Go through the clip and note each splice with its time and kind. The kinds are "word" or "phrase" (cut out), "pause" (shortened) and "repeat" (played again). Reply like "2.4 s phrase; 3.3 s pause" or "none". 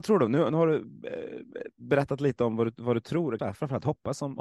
3.4 s word